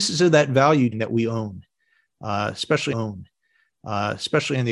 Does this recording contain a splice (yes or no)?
yes